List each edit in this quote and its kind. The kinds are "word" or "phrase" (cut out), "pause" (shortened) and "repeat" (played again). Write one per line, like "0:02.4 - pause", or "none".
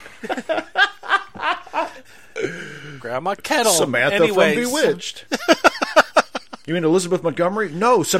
none